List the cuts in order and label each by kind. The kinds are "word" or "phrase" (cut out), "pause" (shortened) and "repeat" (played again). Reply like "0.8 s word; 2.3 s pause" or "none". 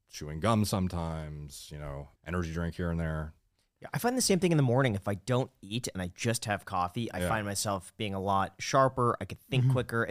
2.1 s pause